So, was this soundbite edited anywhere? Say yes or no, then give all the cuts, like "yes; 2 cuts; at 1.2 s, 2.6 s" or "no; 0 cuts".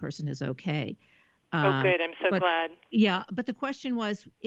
no; 0 cuts